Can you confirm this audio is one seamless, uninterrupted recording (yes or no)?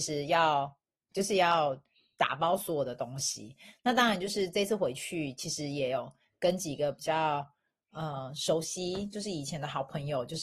no